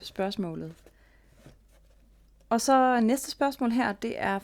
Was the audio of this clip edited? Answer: no; 0 cuts

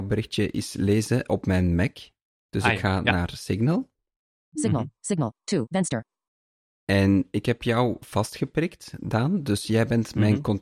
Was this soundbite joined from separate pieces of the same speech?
no; 0 cuts

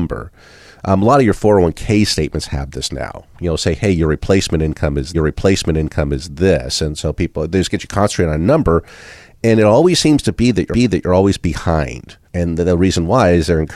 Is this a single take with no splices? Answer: no; 3 cuts; at 5.1 s, 10.7 s, 12.3 s

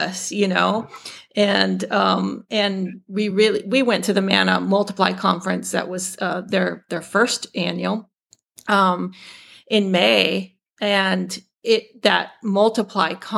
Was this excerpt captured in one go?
yes; 0 cuts

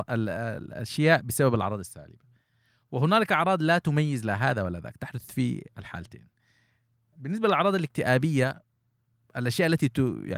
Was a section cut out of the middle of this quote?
no; 0 cuts

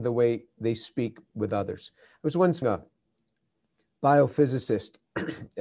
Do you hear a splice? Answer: yes; 2 cuts; at 1.3 s, 2.6 s

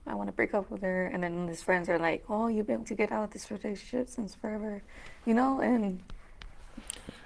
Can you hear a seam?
yes; 1 cut; at 2.8 s

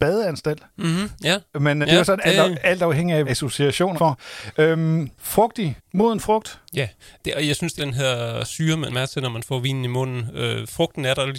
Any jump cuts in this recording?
yes; 6 cuts; at 1.8 s, 3.3 s, 4.0 s, 5.8 s, 7.8 s, 8.9 s

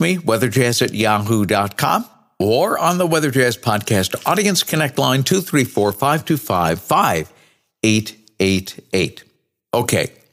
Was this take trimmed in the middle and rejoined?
no; 0 cuts

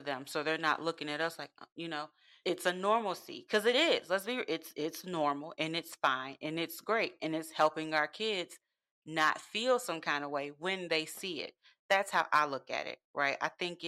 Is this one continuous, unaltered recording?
no; 1 cut; at 2.4 s

